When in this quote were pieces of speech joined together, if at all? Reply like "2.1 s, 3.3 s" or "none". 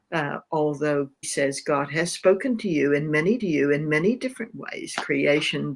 1.2 s, 3.4 s